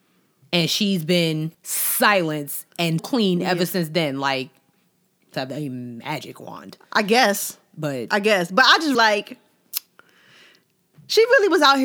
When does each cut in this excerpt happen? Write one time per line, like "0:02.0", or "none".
0:01.5
0:03.0
0:05.3
0:08.9

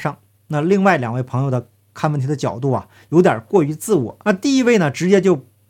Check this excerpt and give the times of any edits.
0:04.2

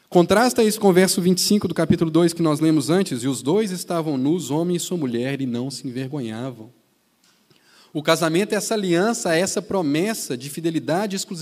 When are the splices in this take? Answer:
none

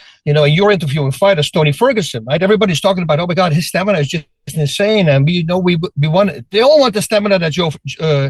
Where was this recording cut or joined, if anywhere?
none

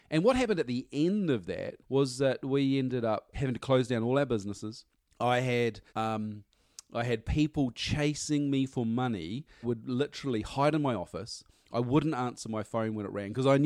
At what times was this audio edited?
0:01.8
0:03.3
0:04.9
0:05.9
0:09.6

